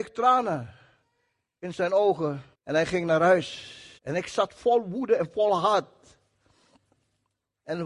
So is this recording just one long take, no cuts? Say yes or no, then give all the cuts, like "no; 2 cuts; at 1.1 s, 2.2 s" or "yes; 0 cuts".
no; 2 cuts; at 2.5 s, 4.0 s